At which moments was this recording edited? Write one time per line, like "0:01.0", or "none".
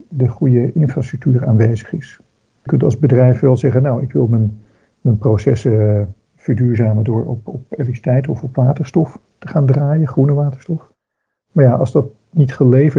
0:02.7